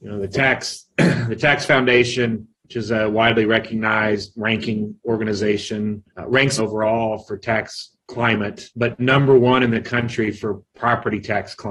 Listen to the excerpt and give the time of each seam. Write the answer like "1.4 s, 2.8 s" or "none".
2.5 s, 6.1 s, 6.6 s, 8.7 s